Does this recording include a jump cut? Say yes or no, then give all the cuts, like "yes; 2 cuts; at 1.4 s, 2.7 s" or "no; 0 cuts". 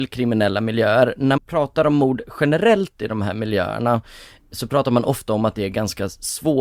yes; 1 cut; at 1.4 s